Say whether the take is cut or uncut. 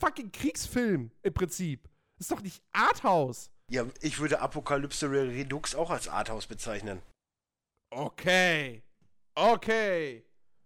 uncut